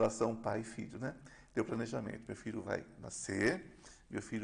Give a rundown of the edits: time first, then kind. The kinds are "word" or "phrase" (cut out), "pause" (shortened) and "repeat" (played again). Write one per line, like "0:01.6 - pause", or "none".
none